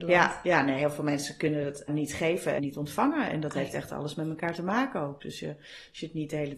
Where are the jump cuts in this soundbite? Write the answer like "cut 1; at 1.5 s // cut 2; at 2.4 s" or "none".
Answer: cut 1; at 1.9 s // cut 2; at 2.6 s